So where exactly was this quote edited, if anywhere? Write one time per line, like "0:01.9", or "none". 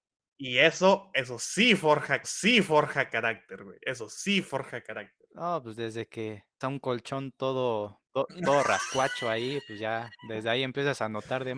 0:01.1
0:02.2
0:06.6
0:08.0
0:10.2